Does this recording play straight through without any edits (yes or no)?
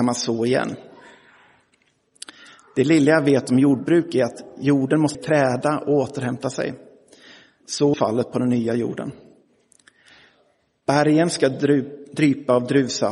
no